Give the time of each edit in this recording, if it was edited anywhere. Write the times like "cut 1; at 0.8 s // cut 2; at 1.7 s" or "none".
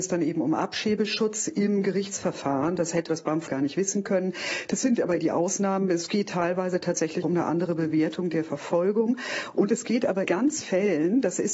cut 1; at 3.1 s // cut 2; at 3.5 s // cut 3; at 5.2 s // cut 4; at 7.2 s // cut 5; at 10.2 s // cut 6; at 10.6 s